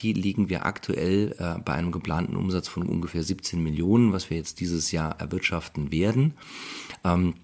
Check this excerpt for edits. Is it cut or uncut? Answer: uncut